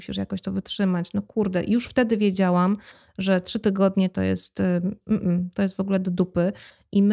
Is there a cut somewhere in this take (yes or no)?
no